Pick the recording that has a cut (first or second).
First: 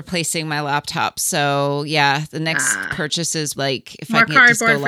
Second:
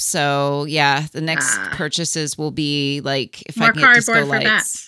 first